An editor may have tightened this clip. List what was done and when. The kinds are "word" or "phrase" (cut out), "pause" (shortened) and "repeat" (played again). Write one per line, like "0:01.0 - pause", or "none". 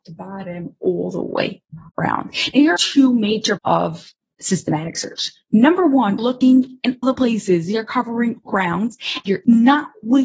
0:01.9 - word
0:02.8 - word
0:03.6 - word
0:06.2 - word
0:07.0 - word
0:08.5 - word
0:09.2 - word